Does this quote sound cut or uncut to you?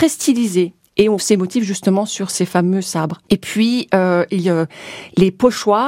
cut